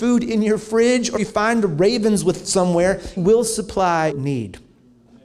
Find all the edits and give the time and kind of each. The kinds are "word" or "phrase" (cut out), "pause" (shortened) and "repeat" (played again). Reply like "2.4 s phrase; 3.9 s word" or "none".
1.2 s word; 2.4 s word; 3.2 s word; 4.1 s word